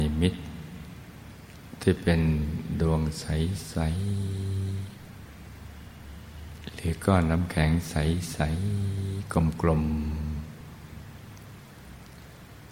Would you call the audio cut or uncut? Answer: uncut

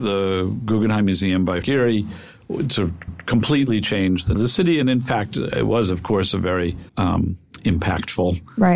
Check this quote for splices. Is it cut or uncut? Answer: cut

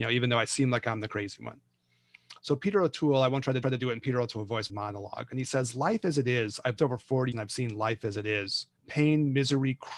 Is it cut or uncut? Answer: cut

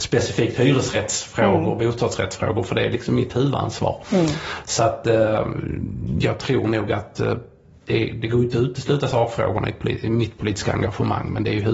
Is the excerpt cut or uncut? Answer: uncut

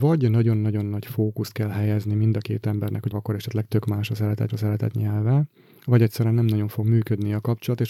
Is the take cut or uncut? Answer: cut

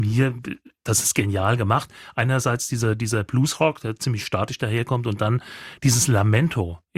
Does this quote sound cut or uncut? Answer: uncut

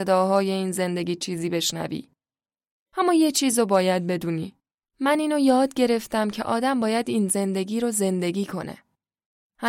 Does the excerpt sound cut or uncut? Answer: uncut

